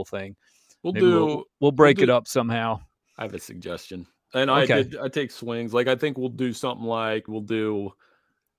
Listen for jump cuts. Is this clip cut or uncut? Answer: cut